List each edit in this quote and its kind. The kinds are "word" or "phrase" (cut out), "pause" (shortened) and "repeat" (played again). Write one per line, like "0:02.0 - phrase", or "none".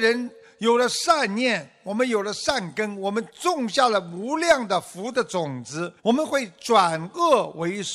0:06.0 - pause